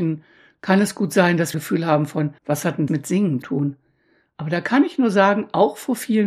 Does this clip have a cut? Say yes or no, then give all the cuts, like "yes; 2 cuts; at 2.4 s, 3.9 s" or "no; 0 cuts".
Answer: yes; 4 cuts; at 1.5 s, 2.4 s, 2.9 s, 3.4 s